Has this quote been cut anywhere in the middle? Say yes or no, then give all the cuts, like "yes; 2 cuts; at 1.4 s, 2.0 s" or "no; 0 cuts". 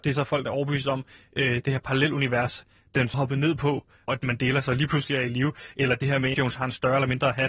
yes; 3 cuts; at 3.1 s, 4.1 s, 6.3 s